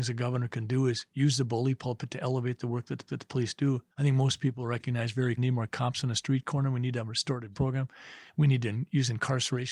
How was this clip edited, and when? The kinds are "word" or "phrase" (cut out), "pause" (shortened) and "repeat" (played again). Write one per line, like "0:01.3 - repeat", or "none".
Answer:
0:03.1 - repeat
0:03.9 - pause
0:05.4 - phrase
0:07.5 - word